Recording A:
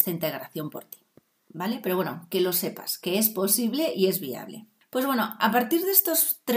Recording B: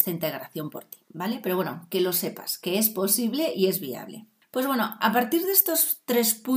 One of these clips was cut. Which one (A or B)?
B